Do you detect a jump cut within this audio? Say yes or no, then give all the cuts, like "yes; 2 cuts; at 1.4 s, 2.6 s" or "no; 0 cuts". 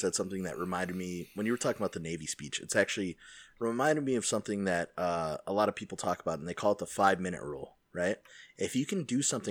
no; 0 cuts